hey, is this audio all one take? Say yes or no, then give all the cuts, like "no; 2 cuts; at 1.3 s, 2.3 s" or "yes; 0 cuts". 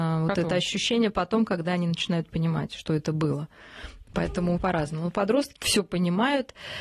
no; 2 cuts; at 4.6 s, 5.6 s